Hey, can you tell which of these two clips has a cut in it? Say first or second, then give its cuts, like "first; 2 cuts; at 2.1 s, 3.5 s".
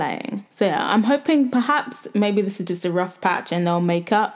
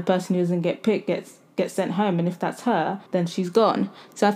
second; 1 cut; at 3.1 s